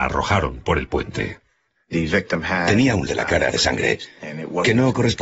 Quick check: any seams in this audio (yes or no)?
yes